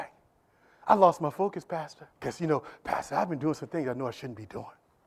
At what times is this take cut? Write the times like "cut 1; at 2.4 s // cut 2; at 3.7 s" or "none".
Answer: cut 1; at 2.2 s